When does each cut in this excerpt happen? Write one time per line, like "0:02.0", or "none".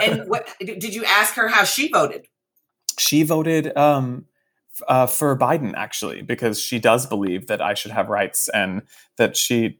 none